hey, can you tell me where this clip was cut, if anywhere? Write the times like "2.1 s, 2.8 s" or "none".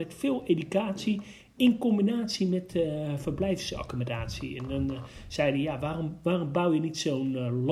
none